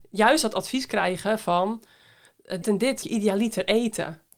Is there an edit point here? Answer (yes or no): yes